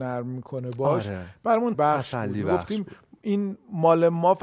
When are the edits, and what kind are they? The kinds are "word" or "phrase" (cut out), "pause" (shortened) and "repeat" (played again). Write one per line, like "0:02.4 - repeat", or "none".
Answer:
0:01.7 - word